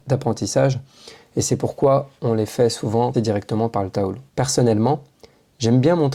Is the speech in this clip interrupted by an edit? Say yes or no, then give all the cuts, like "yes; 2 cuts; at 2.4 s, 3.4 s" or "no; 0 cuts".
yes; 2 cuts; at 3.1 s, 4.3 s